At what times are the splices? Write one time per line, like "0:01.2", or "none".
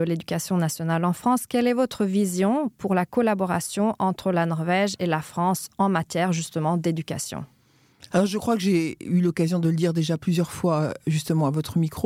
none